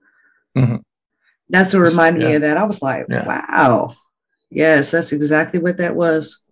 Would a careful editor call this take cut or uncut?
uncut